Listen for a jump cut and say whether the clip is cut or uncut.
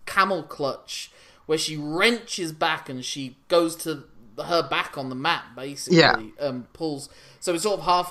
uncut